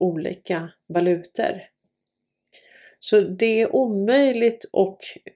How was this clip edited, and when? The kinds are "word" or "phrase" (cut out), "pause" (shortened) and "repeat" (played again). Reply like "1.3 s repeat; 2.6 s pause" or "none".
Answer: none